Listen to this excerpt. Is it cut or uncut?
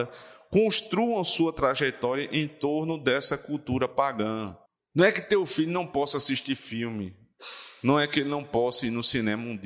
cut